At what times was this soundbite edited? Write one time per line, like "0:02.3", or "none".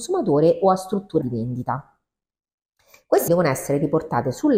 0:01.2
0:03.3

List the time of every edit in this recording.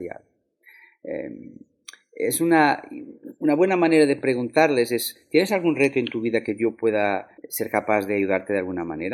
0:07.4

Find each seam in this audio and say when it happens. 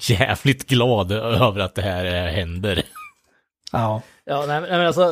none

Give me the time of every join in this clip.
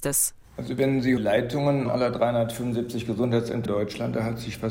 0:01.2
0:01.9
0:03.7

